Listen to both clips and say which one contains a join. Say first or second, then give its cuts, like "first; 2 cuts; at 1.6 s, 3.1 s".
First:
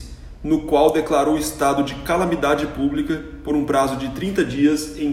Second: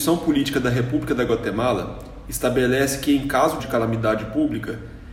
second; 1 cut; at 3.6 s